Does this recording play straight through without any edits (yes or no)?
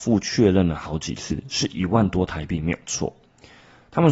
yes